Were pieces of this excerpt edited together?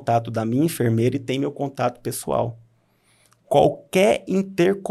no; 0 cuts

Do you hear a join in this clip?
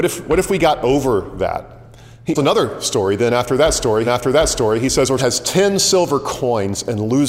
yes; 3 cuts; at 2.4 s, 4.1 s, 5.2 s

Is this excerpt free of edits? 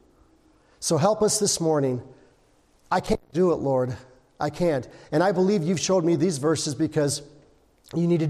yes; 0 cuts

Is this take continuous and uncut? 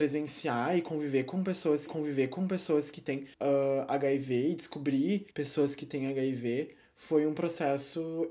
no; 3 cuts; at 1.9 s, 3.3 s, 5.3 s

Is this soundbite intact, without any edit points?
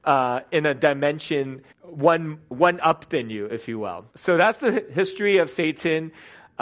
no; 2 cuts; at 1.7 s, 4.1 s

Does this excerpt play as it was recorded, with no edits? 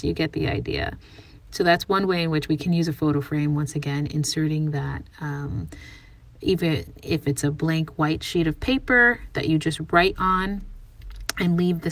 yes; 0 cuts

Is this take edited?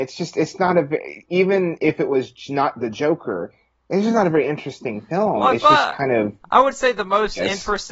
no; 0 cuts

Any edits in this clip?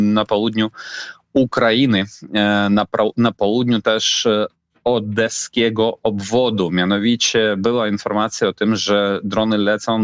no; 0 cuts

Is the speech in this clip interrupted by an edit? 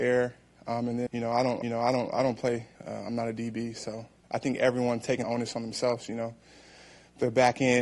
yes; 5 cuts; at 1.1 s, 1.6 s, 2.7 s, 4.2 s, 5.2 s

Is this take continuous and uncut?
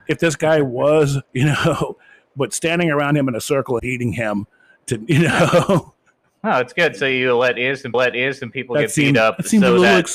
no; 4 cuts; at 1.2 s, 3.8 s, 6.2 s, 7.9 s

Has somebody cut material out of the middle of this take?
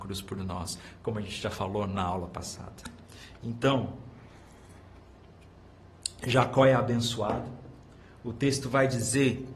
no; 0 cuts

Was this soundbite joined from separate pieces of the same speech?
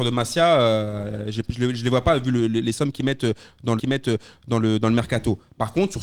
yes; 1 cut; at 3.8 s

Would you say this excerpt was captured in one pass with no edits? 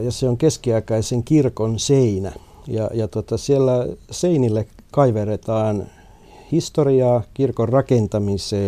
yes; 0 cuts

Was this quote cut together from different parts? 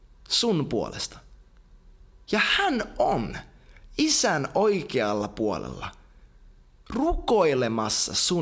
no; 0 cuts

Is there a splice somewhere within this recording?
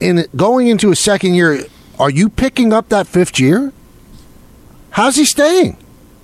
no; 0 cuts

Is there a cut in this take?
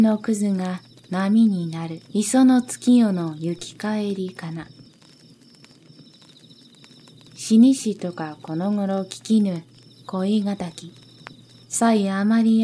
yes; 1 cut; at 2.0 s

